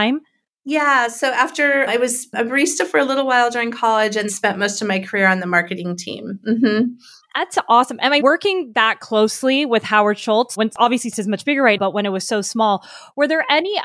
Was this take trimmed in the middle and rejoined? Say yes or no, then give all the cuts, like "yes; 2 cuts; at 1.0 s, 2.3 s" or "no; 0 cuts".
yes; 4 cuts; at 4.3 s, 8.2 s, 11.1 s, 11.8 s